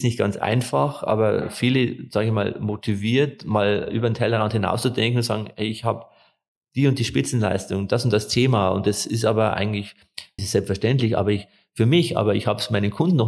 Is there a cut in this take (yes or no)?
yes